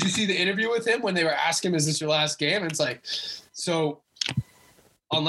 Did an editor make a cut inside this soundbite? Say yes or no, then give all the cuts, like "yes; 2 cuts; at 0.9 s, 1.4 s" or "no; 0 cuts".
yes; 1 cut; at 3.5 s